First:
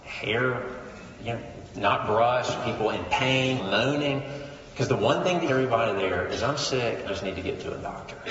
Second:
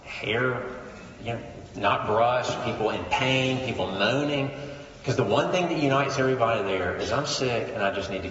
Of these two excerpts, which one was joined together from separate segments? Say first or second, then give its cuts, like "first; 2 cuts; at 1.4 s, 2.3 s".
first; 3 cuts; at 3.6 s, 5.5 s, 7.1 s